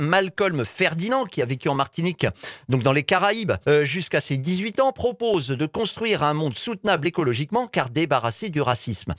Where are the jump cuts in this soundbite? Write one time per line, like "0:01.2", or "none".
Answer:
0:03.6